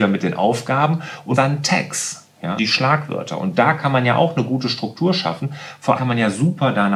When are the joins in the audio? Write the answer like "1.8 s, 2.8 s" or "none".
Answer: 1.3 s, 2.6 s, 6.0 s